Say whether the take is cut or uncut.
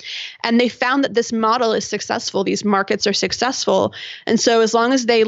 cut